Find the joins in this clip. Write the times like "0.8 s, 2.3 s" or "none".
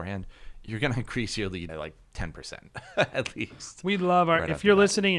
1.7 s